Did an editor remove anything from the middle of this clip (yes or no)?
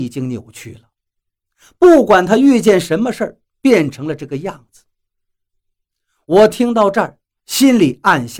no